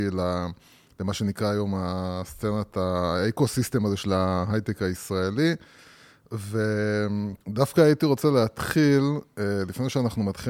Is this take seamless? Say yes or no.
no